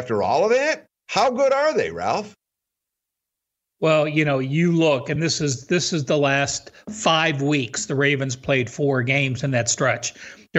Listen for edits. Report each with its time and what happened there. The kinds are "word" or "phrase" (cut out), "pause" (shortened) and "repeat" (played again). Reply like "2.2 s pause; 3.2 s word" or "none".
none